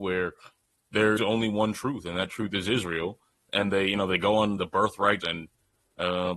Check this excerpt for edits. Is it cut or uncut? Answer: cut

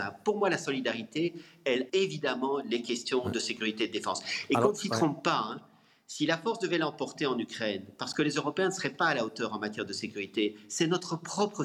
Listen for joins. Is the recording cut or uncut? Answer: cut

